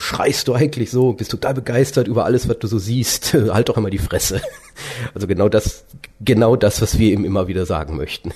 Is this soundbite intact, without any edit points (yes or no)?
no